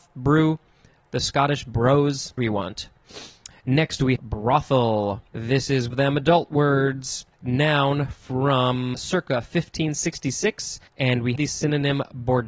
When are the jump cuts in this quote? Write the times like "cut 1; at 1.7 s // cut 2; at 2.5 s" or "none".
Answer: cut 1; at 2.4 s // cut 2; at 4.2 s // cut 3; at 5.3 s // cut 4; at 5.9 s // cut 5; at 7.3 s // cut 6; at 8.9 s // cut 7; at 10.9 s // cut 8; at 11.4 s